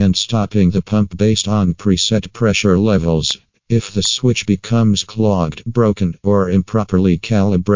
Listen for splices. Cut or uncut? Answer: uncut